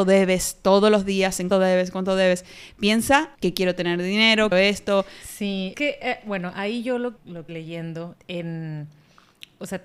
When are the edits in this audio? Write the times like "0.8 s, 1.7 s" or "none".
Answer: 1.5 s, 3.3 s, 4.5 s, 5.7 s, 7.2 s, 7.5 s, 8.1 s